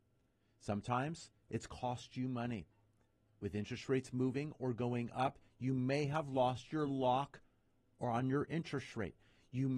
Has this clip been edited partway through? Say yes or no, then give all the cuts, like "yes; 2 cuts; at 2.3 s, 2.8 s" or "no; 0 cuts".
no; 0 cuts